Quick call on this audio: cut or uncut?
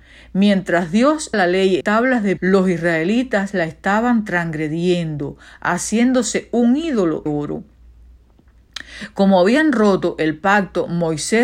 cut